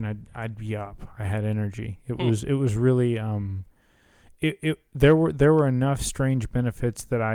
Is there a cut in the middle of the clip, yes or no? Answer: no